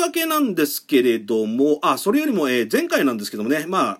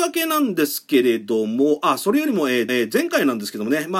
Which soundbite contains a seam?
second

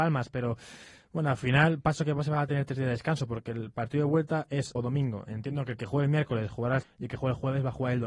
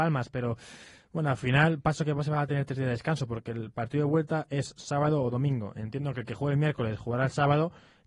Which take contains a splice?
first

